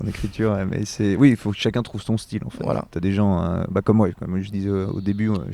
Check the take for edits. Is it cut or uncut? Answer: uncut